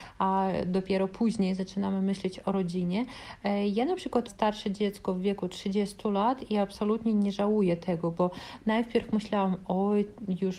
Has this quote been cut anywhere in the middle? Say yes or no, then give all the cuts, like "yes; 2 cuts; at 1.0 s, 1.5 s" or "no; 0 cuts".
yes; 1 cut; at 4.3 s